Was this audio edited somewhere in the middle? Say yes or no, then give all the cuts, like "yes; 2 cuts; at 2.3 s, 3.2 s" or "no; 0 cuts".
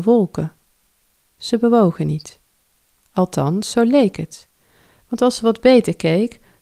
no; 0 cuts